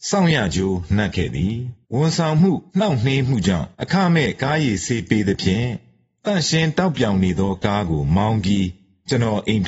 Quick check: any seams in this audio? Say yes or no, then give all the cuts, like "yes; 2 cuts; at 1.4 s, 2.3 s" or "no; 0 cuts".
yes; 3 cuts; at 1.8 s, 2.7 s, 3.7 s